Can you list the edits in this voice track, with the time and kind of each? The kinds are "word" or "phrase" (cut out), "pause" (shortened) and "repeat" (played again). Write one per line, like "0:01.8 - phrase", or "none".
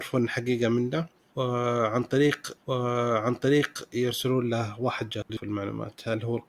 0:02.6 - repeat
0:05.3 - word